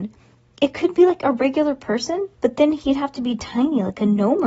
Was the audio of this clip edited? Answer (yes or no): yes